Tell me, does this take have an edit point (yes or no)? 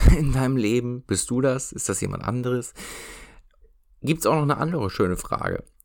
no